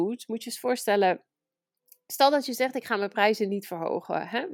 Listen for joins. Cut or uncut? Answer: uncut